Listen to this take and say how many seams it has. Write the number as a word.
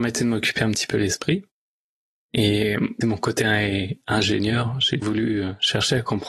two